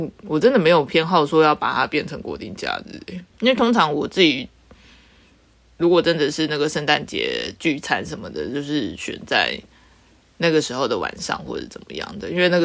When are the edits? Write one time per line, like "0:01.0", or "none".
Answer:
0:03.3

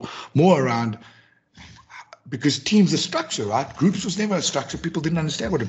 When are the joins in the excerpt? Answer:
none

